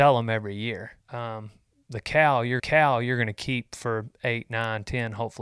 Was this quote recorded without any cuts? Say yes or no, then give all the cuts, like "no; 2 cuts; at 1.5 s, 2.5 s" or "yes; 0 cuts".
no; 2 cuts; at 1.0 s, 2.6 s